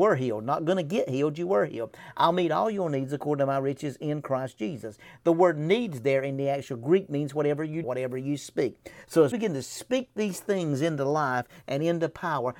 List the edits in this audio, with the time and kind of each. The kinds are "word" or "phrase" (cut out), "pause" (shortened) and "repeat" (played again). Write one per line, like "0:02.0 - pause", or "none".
0:07.8 - word
0:09.3 - word